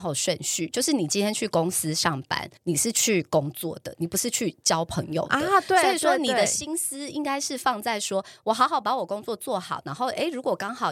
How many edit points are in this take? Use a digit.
1